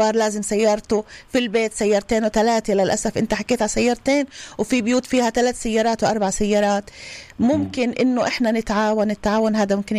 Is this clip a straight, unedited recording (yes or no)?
yes